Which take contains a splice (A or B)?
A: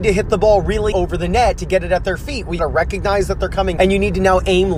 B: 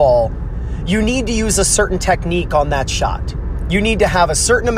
A